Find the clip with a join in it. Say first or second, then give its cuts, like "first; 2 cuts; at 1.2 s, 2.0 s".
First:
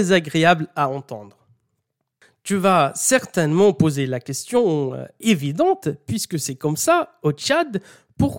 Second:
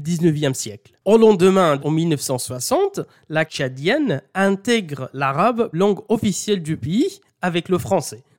second; 4 cuts; at 1.0 s, 1.8 s, 3.5 s, 5.7 s